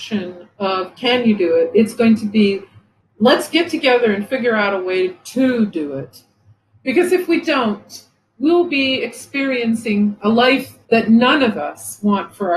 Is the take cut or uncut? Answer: cut